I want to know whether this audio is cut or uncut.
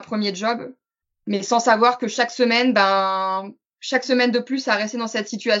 uncut